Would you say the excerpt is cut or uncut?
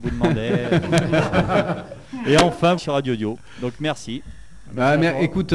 cut